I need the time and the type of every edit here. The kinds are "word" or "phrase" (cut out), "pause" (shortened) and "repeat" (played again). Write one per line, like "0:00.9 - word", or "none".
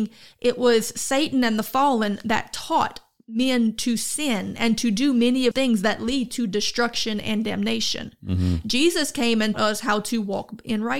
0:05.5 - word
0:09.5 - word